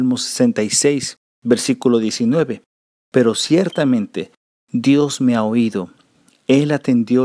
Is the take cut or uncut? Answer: uncut